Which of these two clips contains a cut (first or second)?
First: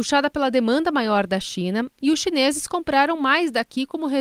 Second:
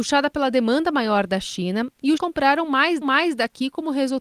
second